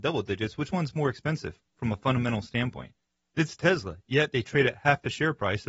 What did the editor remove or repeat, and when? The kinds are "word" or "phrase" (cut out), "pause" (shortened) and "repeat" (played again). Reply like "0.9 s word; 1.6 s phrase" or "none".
none